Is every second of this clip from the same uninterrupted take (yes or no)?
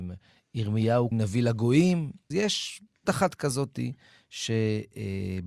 no